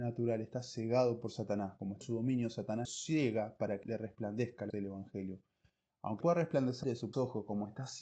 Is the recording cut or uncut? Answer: cut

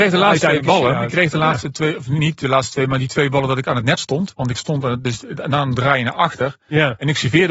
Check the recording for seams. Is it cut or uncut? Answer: uncut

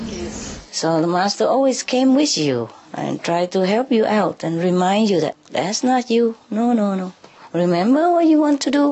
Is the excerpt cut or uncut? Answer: uncut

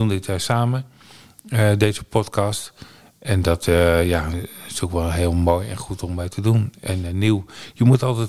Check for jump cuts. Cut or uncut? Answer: uncut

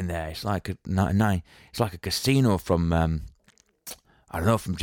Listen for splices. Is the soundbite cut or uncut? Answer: uncut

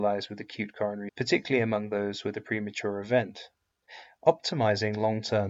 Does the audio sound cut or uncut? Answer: cut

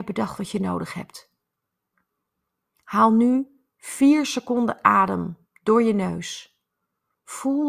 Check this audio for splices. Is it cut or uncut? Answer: uncut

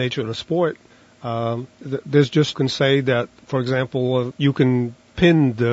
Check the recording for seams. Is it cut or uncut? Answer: cut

